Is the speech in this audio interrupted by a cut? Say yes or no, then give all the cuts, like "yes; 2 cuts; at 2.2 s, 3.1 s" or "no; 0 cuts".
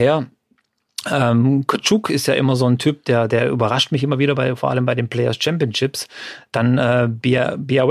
no; 0 cuts